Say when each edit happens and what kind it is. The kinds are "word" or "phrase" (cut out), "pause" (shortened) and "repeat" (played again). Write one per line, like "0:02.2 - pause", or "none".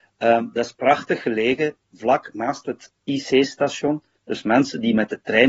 none